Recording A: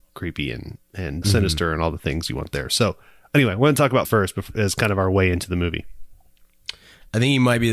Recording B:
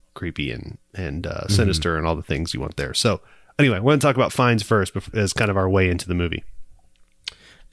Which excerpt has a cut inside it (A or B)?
A